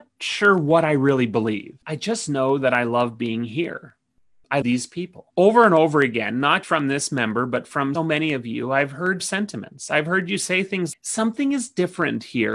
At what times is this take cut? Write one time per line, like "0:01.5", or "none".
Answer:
0:01.8
0:04.6
0:05.3
0:06.6
0:07.9
0:09.2
0:10.9